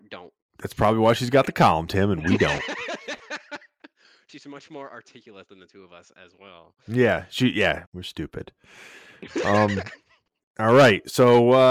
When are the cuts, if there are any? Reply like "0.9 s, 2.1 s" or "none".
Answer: 7.8 s